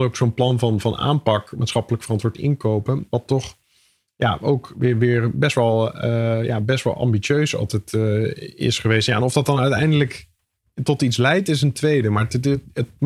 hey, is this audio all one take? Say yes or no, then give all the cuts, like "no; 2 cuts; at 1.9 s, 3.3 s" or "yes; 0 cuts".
yes; 0 cuts